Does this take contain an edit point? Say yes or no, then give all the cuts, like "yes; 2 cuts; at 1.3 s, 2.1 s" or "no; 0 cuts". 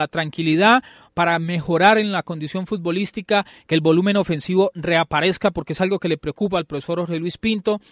no; 0 cuts